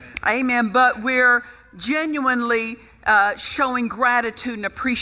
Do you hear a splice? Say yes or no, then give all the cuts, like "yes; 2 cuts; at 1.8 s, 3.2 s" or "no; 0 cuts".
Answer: no; 0 cuts